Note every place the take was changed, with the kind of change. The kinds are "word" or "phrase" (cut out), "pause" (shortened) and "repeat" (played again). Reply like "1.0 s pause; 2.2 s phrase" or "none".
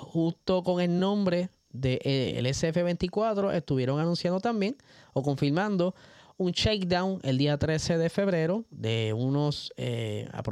none

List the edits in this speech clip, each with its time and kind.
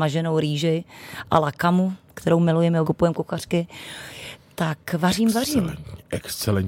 2.8 s phrase

